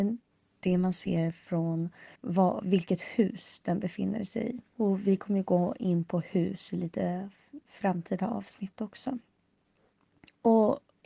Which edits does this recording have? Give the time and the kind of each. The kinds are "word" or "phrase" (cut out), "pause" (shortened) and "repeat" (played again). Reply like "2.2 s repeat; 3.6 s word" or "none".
2.2 s pause; 4.7 s pause